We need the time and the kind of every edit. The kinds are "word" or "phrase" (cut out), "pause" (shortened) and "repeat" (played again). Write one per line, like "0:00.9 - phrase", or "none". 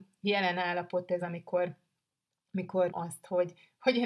0:01.2 - word
0:02.9 - word